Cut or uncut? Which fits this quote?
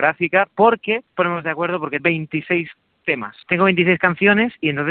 cut